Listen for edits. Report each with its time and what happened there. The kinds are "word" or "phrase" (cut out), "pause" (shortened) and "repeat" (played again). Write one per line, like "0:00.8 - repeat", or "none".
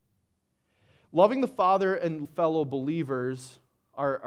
0:02.2 - word